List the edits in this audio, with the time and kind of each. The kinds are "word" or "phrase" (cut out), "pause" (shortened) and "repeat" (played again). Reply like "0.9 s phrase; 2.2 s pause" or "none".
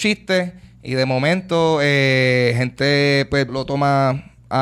3.5 s word